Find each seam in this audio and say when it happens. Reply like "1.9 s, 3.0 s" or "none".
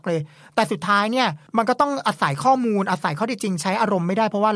1.5 s